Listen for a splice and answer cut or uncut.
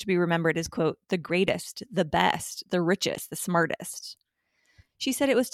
uncut